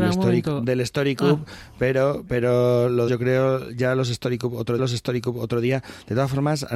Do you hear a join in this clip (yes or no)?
yes